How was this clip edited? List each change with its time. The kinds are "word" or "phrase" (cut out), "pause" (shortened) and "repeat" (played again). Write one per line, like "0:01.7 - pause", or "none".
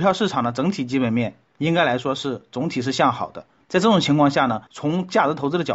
0:03.6 - pause
0:04.7 - pause